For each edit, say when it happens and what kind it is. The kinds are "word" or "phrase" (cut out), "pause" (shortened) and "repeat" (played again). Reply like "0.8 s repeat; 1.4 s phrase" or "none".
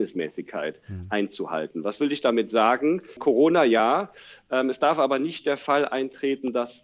none